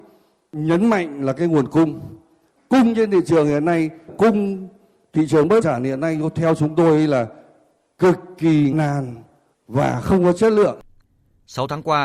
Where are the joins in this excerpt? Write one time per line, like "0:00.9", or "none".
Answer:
0:04.1
0:05.6
0:08.7